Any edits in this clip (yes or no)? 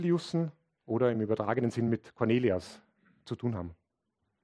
no